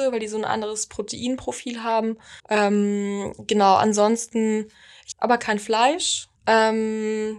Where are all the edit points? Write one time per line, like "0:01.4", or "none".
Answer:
0:02.4
0:05.1
0:06.4